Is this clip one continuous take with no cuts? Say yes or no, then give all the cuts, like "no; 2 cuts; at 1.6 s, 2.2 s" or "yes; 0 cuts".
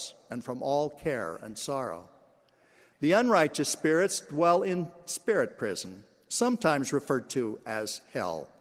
yes; 0 cuts